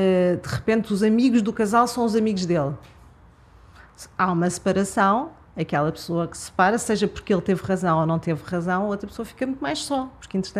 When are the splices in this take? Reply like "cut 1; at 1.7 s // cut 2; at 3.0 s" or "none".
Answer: none